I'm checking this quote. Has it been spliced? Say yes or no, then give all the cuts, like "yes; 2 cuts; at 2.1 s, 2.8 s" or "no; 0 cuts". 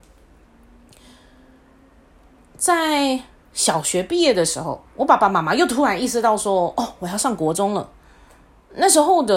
yes; 1 cut; at 4.9 s